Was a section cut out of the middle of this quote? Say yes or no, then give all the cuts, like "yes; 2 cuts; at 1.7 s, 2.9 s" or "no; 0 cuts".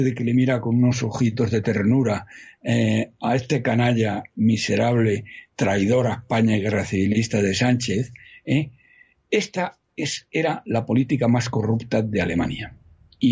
no; 0 cuts